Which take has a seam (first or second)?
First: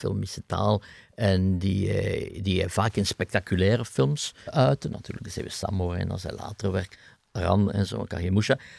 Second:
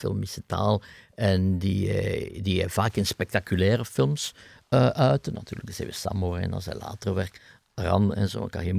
first